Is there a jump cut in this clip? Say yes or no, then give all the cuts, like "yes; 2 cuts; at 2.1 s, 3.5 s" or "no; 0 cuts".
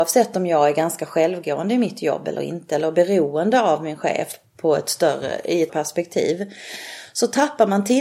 yes; 1 cut; at 5.7 s